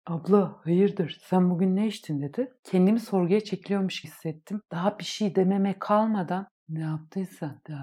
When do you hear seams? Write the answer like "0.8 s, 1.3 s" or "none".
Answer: 4.0 s